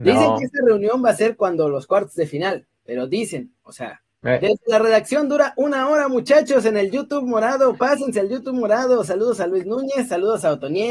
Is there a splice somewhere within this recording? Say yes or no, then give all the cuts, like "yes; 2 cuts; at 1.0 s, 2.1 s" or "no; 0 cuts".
yes; 1 cut; at 4.1 s